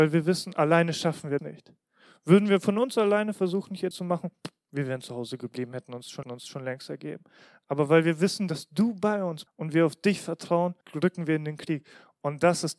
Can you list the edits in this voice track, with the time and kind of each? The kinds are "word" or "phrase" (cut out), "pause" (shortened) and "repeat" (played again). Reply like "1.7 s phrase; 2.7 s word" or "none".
1.4 s word; 3.9 s word; 6.2 s repeat; 9.5 s word; 10.8 s pause